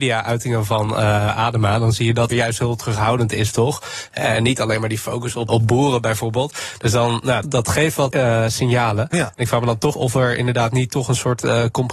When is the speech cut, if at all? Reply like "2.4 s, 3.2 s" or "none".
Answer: 2.3 s, 5.5 s, 7.4 s, 8.1 s, 9.9 s